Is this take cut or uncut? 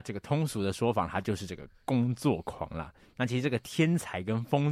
uncut